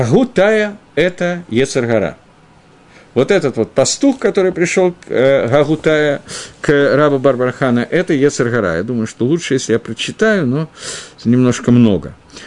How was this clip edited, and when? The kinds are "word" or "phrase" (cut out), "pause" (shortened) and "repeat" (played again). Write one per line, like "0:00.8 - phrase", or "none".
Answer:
none